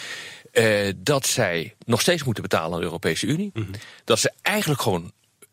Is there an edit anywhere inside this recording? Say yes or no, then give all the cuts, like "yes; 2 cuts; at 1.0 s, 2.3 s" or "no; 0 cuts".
no; 0 cuts